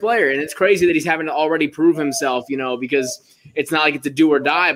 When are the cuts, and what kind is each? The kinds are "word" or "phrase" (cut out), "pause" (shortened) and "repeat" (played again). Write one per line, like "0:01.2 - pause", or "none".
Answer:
none